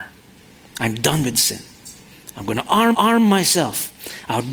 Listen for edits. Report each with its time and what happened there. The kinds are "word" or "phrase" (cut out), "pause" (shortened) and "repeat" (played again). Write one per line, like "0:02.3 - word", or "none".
0:02.9 - repeat

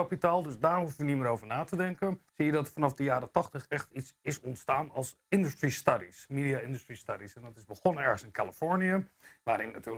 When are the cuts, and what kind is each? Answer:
0:02.3 - pause

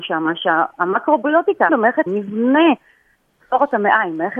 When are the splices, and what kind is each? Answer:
0:01.7 - word
0:02.1 - word

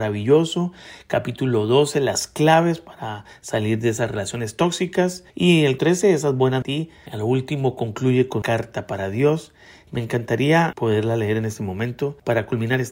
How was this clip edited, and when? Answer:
0:05.3 - pause
0:05.8 - word
0:06.6 - phrase
0:08.4 - word

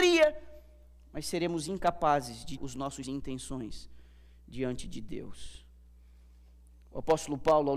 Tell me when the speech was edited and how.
0:02.6 - word
0:03.0 - word

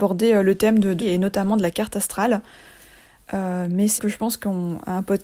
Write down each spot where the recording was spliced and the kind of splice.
0:01.0 - word
0:04.0 - word

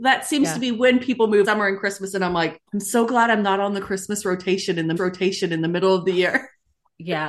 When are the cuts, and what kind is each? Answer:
0:01.4 - word
0:02.7 - pause
0:05.0 - repeat

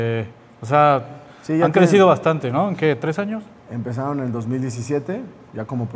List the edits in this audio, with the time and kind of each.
0:03.6 - pause

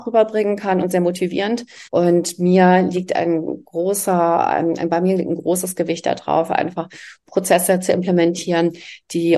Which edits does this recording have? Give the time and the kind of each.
0:01.9 - pause

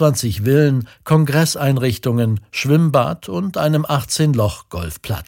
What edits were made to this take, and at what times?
none

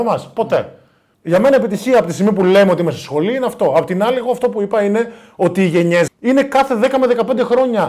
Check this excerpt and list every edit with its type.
0:01.1 - pause
0:06.1 - word

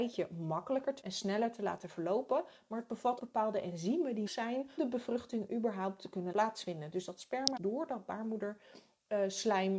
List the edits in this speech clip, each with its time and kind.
0:01.0 - word
0:03.2 - word
0:04.3 - word
0:04.8 - word
0:06.3 - word
0:07.6 - word

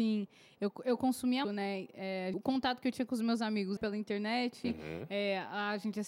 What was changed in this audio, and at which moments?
0:01.4 - word
0:02.3 - word
0:03.8 - word

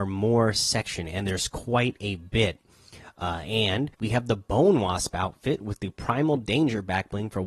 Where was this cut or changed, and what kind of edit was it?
0:03.9 - pause

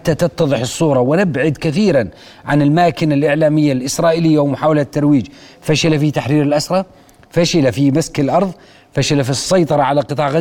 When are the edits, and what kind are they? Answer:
none

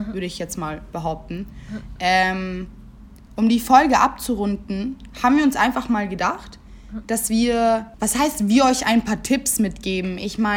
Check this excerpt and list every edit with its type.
none

